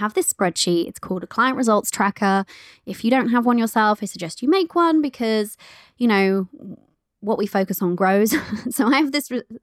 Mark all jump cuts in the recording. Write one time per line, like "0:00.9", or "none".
none